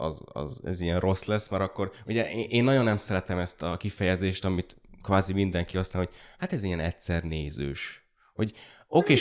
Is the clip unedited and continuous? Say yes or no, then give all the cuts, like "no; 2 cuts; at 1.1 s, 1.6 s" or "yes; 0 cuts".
yes; 0 cuts